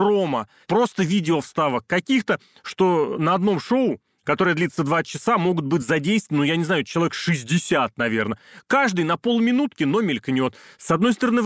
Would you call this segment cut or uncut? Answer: uncut